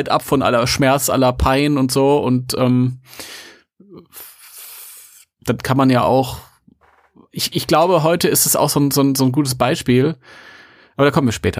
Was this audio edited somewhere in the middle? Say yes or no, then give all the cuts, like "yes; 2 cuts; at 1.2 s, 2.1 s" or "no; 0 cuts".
yes; 1 cut; at 7.5 s